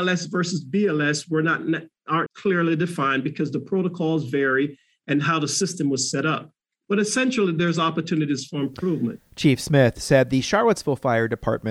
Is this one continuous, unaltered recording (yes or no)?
no